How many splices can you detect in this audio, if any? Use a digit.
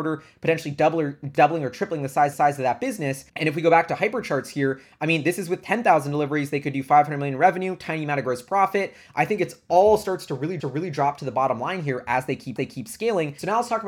4